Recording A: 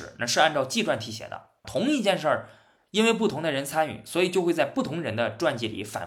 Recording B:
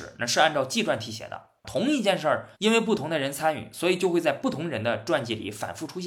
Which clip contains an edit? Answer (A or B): B